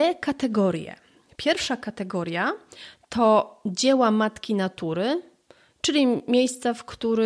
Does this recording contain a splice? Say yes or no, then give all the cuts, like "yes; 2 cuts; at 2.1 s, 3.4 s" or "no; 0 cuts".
no; 0 cuts